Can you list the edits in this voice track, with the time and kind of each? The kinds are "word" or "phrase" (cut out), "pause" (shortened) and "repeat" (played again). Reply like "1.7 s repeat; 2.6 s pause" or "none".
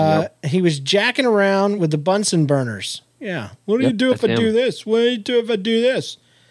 none